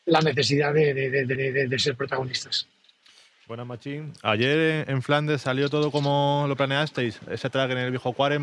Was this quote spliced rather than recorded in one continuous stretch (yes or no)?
yes